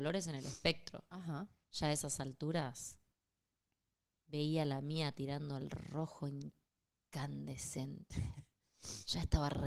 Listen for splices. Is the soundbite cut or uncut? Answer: uncut